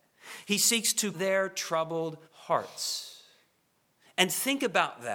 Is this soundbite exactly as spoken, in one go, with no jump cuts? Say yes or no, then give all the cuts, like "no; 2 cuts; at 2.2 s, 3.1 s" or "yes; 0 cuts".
no; 2 cuts; at 1.1 s, 2.2 s